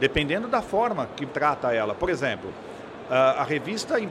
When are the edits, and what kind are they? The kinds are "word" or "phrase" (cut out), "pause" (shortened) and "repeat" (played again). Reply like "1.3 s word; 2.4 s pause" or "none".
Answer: 1.3 s word

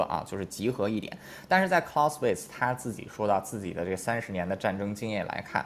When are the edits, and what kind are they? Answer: none

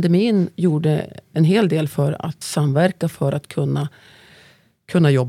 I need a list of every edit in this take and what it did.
2.4 s phrase

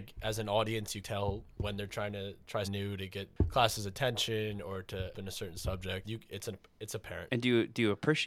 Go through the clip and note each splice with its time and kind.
1.0 s word; 2.6 s word; 5.1 s word; 6.0 s word

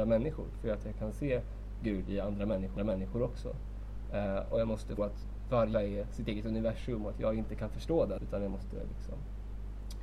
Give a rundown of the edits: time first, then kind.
2.8 s repeat; 5.0 s word; 5.7 s word; 8.2 s word

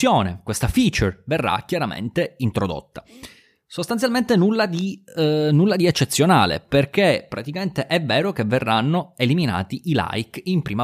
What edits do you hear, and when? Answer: none

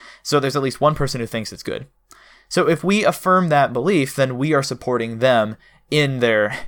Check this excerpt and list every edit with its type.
none

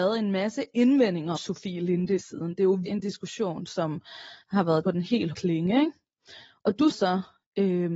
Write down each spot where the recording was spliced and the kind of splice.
1.4 s word; 2.2 s word; 2.9 s word; 4.8 s word; 5.3 s word; 6.9 s word

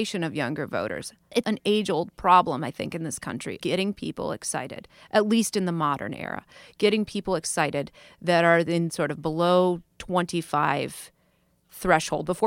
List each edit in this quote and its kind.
1.4 s word; 3.6 s word; 8.9 s word

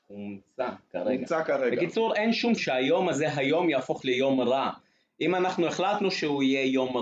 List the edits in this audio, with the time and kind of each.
2.6 s phrase; 4.0 s word

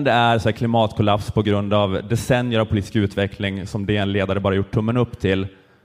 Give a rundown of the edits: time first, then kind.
none

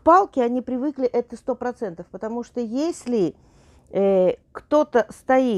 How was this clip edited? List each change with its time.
4.4 s pause

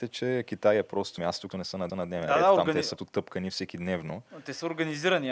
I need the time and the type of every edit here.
1.2 s word; 1.5 s phrase; 1.9 s repeat; 3.0 s word

